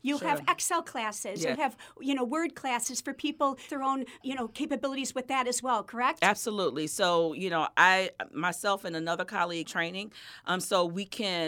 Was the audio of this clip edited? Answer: yes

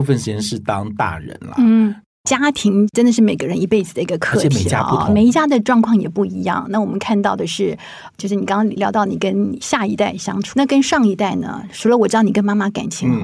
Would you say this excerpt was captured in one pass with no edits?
no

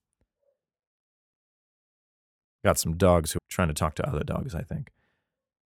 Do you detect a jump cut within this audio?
yes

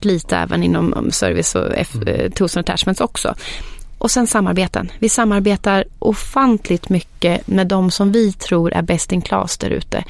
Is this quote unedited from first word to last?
yes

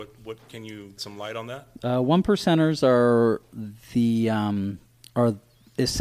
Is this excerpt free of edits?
no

